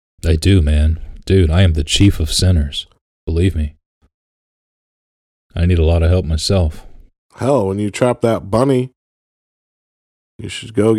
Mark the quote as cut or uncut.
uncut